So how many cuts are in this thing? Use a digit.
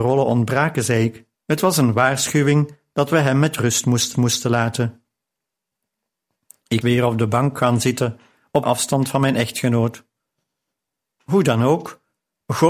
4